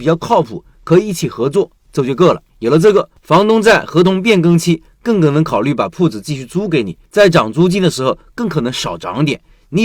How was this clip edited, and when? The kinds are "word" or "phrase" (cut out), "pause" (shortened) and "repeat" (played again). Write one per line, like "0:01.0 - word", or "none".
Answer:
0:02.5 - pause
0:03.2 - pause
0:07.1 - pause